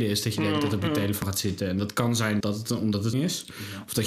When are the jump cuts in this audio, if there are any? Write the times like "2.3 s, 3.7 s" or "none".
2.4 s, 3.1 s